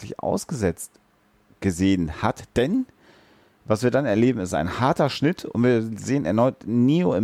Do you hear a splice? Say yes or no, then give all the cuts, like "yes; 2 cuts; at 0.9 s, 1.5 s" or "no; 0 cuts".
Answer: no; 0 cuts